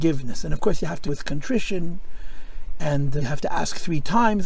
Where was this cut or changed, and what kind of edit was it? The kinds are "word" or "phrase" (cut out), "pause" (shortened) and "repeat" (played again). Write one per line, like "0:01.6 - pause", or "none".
0:01.1 - phrase
0:03.2 - word